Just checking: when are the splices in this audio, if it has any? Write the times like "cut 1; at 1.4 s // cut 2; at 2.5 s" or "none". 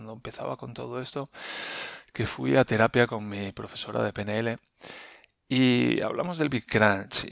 none